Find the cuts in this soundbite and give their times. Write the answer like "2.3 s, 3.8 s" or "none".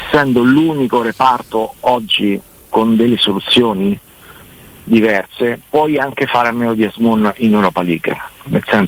none